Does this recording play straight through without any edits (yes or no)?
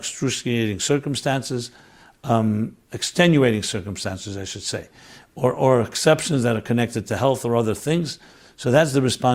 yes